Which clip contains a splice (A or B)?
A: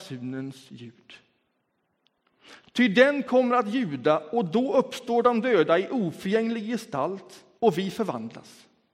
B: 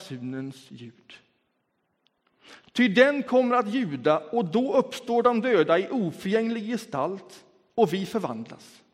A